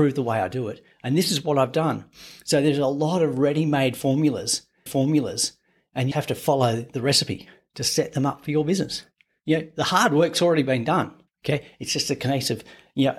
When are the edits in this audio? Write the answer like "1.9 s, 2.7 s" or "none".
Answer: 4.9 s, 6.1 s, 11.3 s